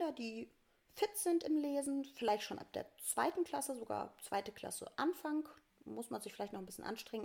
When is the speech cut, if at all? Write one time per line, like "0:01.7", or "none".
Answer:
none